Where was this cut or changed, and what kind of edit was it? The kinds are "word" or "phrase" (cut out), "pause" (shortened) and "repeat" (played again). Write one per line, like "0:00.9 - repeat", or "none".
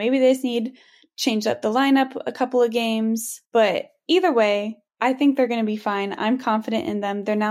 0:03.5 - pause
0:04.9 - pause